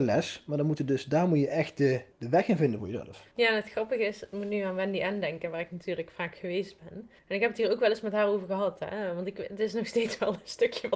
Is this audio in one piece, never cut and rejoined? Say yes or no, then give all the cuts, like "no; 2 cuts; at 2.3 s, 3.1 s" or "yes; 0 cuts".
no; 3 cuts; at 2.1 s, 3.3 s, 7.2 s